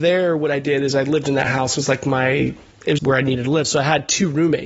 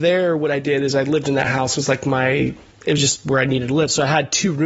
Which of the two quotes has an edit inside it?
first; 1 cut; at 3.0 s

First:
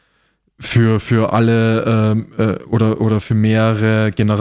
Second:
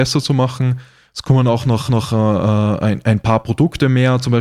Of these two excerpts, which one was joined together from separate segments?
second; 1 cut; at 1.9 s

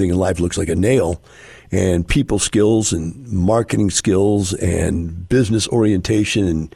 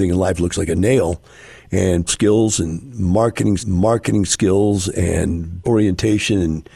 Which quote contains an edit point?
second; 3 cuts; at 2.1 s, 3.6 s, 5.6 s

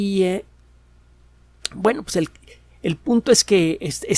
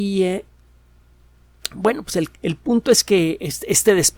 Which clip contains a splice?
second; 1 cut; at 2.4 s

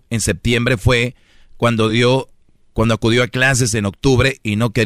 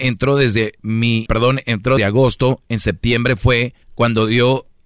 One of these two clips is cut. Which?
second; 3 cuts; at 1.3 s, 2.0 s, 3.8 s

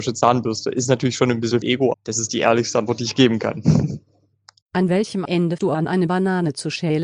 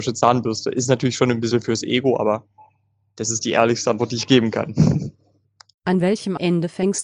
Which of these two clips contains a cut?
first; 3 cuts; at 1.6 s, 1.9 s, 5.6 s

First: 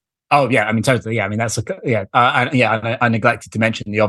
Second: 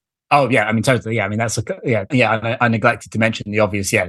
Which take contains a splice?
second; 1 cut; at 2.1 s

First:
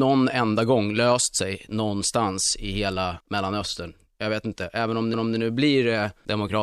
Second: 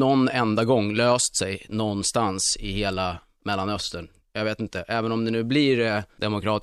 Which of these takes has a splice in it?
first; 2 cuts; at 3.2 s, 5.1 s

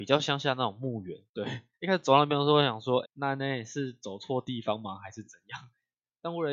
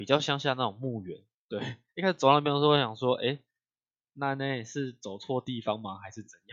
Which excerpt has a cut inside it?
first; 2 cuts; at 1.3 s, 3.0 s

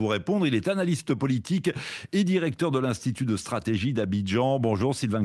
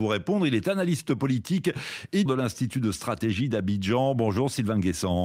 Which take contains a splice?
second; 1 cut; at 2.3 s

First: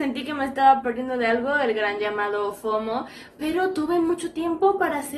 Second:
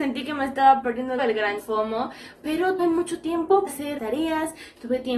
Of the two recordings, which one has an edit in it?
second; 5 cuts; at 1.2 s, 1.6 s, 2.8 s, 3.7 s, 4.0 s

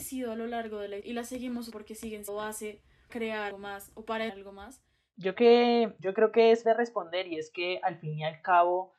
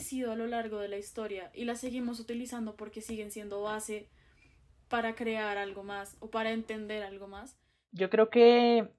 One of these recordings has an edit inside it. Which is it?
first; 9 cuts; at 1.0 s, 1.7 s, 2.3 s, 3.1 s, 3.5 s, 4.3 s, 5.3 s, 6.0 s, 6.6 s

